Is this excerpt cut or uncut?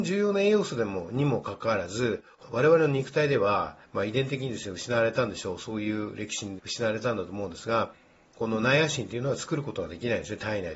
cut